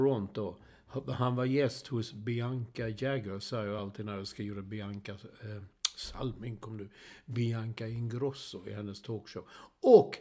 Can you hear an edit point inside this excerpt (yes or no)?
no